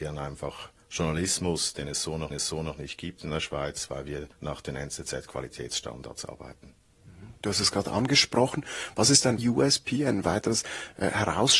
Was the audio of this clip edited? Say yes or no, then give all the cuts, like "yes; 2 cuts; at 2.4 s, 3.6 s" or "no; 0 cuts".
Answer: yes; 3 cuts; at 2.3 s, 4.3 s, 9.4 s